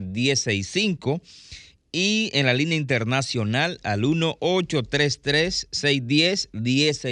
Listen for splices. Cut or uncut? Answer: uncut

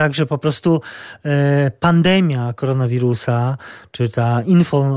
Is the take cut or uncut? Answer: uncut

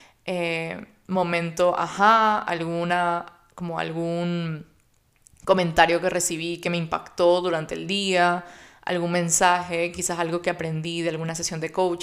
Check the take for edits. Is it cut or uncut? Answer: uncut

